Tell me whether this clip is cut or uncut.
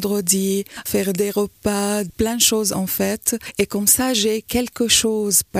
uncut